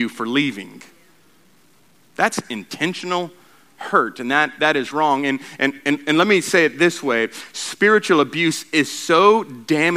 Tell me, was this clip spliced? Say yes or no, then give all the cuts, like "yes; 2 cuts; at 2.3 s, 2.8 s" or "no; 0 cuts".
no; 0 cuts